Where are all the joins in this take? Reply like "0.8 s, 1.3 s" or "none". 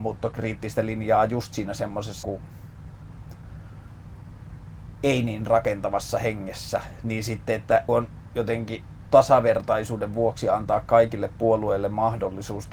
2.2 s, 7.9 s, 9.0 s